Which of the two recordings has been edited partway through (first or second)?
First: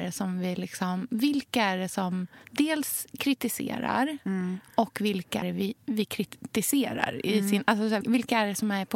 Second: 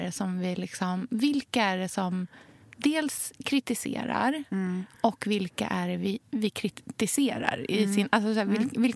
first